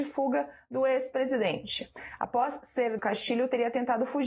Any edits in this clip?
yes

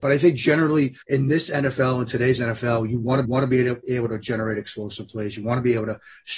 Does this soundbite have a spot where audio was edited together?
yes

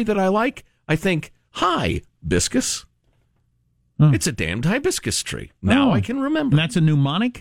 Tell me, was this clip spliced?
no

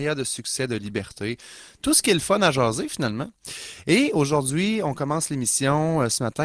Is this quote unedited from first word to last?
yes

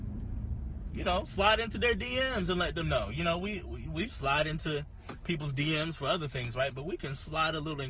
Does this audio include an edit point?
no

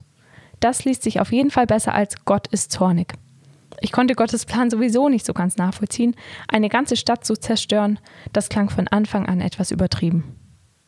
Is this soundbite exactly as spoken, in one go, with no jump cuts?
yes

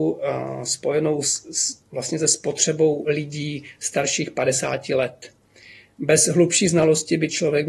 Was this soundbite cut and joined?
yes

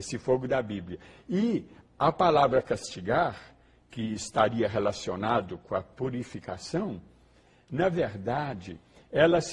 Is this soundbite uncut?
yes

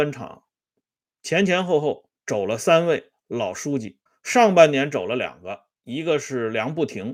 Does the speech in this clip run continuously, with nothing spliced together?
no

